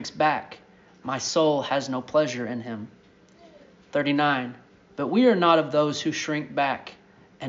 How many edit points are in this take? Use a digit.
1